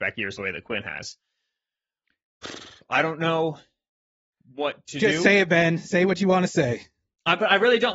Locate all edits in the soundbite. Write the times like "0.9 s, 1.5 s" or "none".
none